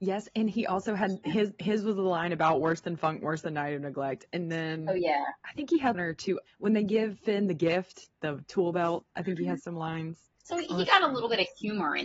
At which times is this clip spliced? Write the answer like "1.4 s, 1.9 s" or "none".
5.9 s, 6.5 s, 8.2 s, 10.3 s